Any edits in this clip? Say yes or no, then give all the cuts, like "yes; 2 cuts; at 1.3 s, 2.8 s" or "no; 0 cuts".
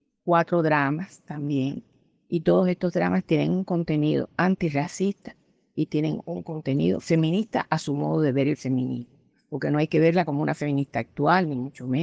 no; 0 cuts